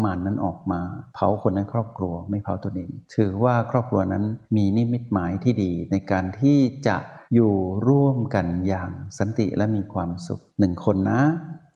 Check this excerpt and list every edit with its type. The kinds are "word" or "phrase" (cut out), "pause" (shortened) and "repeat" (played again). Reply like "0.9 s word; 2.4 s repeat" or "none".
1.1 s pause; 3.0 s pause; 4.5 s pause; 7.3 s pause; 10.5 s pause